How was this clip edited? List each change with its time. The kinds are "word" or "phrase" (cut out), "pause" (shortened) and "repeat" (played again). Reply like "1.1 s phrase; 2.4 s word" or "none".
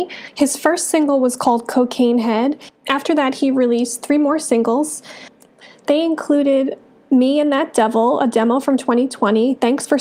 none